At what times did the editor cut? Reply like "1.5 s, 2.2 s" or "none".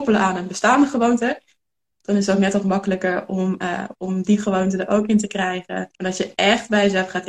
5.9 s